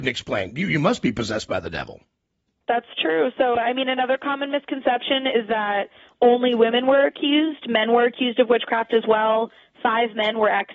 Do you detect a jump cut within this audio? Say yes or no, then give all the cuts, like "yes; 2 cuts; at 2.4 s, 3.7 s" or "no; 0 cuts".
no; 0 cuts